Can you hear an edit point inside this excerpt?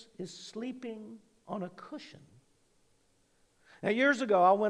no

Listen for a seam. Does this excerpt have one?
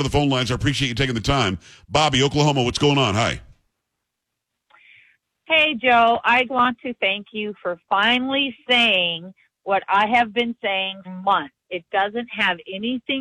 yes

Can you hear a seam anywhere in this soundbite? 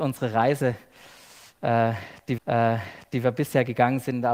yes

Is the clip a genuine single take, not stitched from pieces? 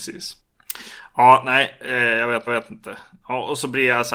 no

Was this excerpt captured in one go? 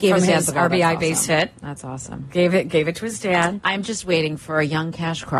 yes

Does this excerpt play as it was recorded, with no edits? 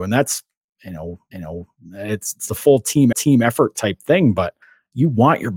no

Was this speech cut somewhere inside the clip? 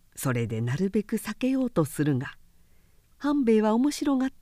no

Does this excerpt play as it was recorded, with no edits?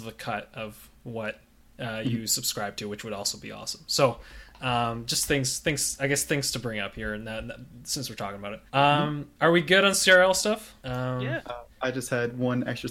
no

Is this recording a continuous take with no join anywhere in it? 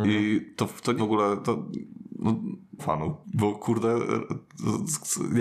no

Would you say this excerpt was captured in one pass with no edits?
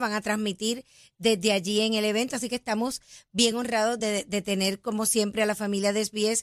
yes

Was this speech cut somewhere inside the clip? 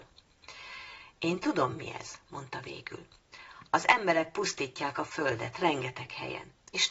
no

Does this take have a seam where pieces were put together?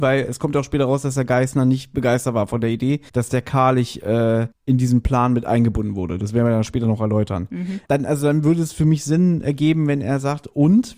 yes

